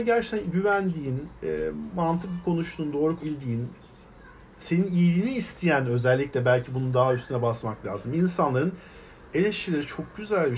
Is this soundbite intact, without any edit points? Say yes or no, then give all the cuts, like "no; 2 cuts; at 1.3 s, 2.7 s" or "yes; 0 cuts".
no; 2 cuts; at 3.2 s, 4.4 s